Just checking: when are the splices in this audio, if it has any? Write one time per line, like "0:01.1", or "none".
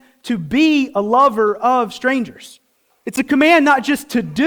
none